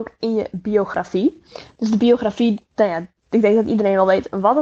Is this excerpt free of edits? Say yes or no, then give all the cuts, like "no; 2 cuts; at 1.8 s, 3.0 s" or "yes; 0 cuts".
yes; 0 cuts